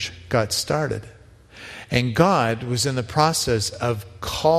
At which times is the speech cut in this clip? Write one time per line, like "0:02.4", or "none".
none